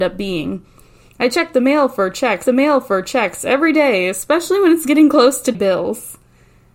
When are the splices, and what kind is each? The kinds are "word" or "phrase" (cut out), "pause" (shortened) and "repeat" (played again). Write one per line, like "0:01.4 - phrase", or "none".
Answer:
0:02.5 - repeat
0:05.5 - phrase